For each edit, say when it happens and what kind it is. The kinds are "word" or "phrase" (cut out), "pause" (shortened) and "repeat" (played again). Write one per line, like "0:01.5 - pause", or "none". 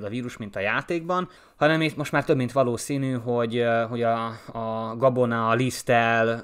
0:01.4 - pause